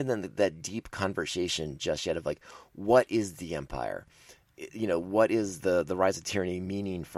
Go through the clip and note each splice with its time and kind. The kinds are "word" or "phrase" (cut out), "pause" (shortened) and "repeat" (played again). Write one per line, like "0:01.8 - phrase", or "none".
none